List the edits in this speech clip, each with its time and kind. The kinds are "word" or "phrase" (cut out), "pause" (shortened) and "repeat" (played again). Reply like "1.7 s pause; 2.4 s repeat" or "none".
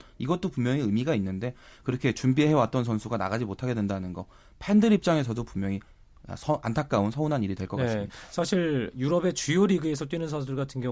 none

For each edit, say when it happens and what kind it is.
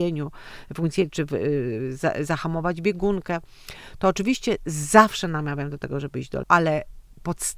6.4 s word

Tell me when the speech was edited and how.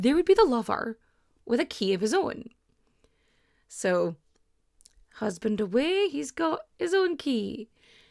none

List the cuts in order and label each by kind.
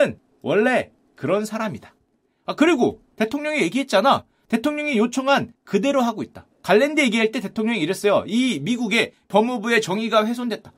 6.5 s pause

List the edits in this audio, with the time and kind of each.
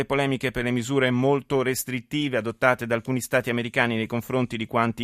none

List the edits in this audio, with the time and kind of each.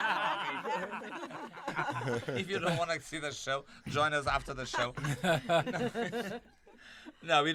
none

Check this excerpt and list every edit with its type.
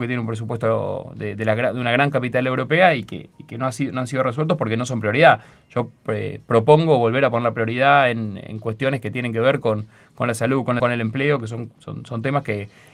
10.8 s word

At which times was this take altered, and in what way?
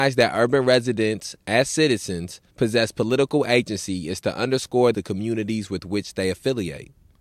2.5 s pause; 4.9 s phrase

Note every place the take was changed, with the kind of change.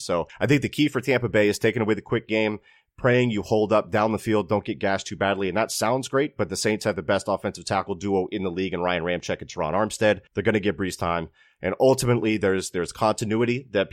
10.3 s pause

